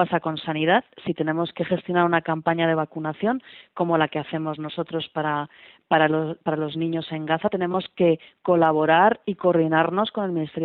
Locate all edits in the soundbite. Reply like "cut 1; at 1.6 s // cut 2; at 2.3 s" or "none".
none